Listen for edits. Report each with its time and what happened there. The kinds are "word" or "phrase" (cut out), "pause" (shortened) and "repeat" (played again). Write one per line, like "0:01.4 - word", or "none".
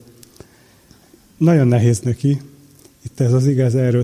0:02.0 - word